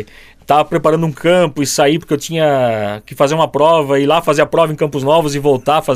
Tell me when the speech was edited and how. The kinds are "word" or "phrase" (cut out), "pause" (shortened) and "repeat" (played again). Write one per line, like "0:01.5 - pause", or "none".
none